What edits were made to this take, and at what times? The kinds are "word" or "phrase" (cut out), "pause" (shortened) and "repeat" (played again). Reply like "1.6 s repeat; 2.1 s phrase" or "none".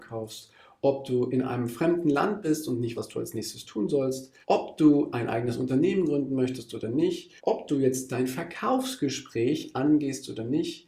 2.9 s word; 4.4 s pause; 7.4 s pause